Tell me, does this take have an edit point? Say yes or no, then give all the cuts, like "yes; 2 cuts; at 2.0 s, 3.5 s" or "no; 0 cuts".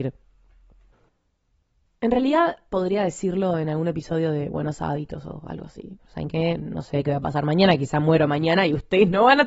no; 0 cuts